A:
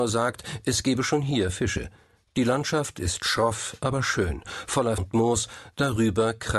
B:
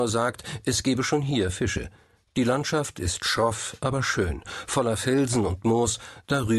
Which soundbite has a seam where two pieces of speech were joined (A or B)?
A